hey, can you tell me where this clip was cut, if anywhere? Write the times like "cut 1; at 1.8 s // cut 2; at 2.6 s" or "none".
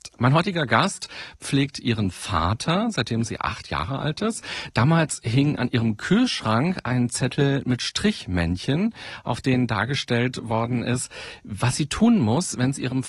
none